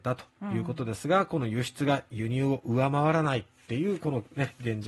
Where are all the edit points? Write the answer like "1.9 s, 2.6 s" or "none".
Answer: none